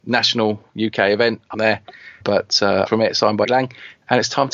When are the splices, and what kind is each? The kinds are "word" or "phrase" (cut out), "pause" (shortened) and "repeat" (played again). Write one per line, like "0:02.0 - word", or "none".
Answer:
0:01.5 - word
0:02.2 - word
0:02.9 - phrase
0:03.4 - word